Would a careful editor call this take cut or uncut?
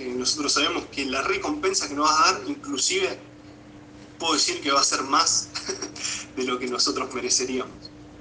uncut